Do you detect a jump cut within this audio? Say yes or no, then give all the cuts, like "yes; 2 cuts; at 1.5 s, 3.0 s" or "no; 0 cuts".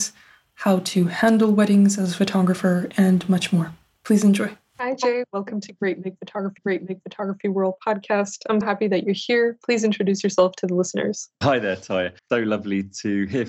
yes; 3 cuts; at 6.6 s, 8.6 s, 12.2 s